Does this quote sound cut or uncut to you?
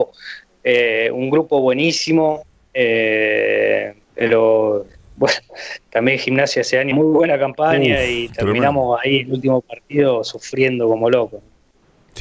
cut